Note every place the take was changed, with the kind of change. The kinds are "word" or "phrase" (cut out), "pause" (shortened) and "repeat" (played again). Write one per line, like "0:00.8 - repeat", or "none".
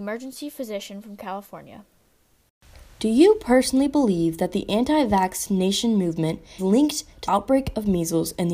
0:06.6 - word
0:07.3 - word